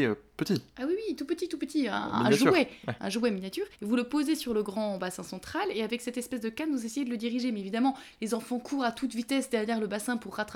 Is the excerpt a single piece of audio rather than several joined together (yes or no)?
no